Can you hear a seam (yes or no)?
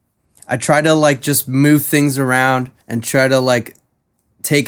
yes